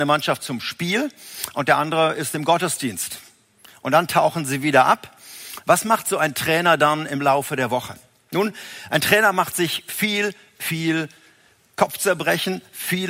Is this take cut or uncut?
uncut